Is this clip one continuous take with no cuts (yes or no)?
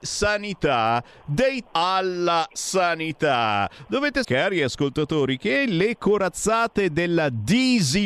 no